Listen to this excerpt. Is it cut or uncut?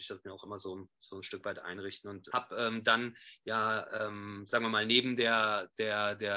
cut